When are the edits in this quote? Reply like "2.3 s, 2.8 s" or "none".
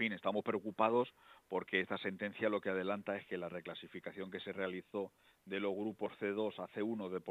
none